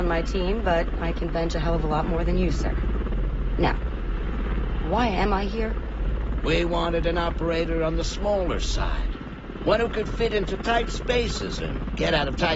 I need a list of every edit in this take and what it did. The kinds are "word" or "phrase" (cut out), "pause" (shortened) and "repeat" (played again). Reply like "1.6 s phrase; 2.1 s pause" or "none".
none